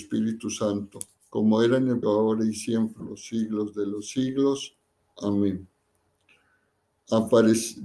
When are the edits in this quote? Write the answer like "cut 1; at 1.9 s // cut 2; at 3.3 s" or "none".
cut 1; at 1.2 s // cut 2; at 2.0 s // cut 3; at 3.0 s

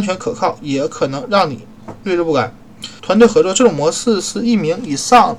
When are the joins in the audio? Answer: cut 1; at 3.0 s

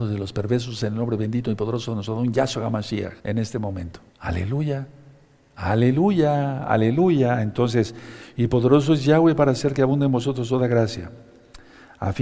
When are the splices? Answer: cut 1; at 3.2 s // cut 2; at 4.1 s

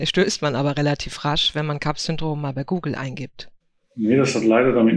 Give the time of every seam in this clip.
none

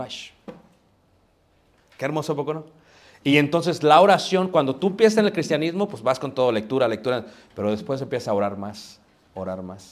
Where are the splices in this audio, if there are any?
none

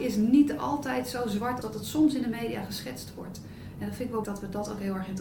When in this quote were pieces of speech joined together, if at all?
cut 1; at 1.6 s // cut 2; at 4.2 s

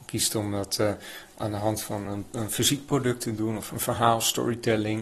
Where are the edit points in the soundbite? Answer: none

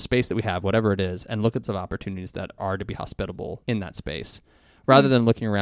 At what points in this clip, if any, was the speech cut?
cut 1; at 1.6 s // cut 2; at 2.6 s // cut 3; at 3.6 s

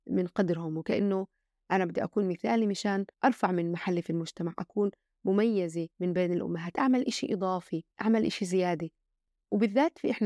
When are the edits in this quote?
cut 1; at 3.1 s // cut 2; at 5.9 s // cut 3; at 7.9 s

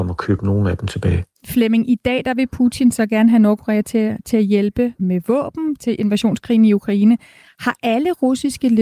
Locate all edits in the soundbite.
cut 1; at 1.3 s

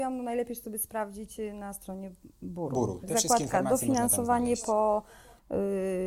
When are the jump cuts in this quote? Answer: none

